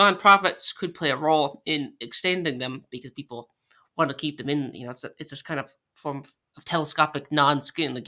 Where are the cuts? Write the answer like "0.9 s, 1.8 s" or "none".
none